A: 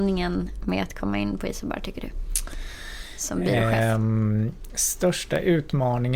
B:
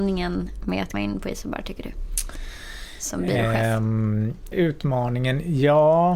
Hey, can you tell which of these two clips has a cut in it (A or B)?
B